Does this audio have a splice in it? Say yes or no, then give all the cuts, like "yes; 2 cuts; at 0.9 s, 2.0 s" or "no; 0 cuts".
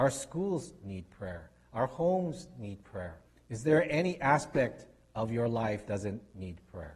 yes; 2 cuts; at 3.3 s, 5.9 s